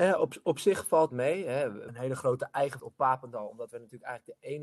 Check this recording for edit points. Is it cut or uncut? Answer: cut